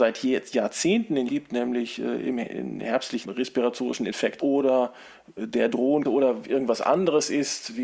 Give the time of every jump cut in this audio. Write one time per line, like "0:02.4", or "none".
0:01.3
0:03.2
0:04.4
0:06.0